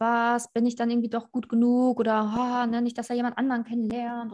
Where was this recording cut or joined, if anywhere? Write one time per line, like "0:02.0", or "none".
none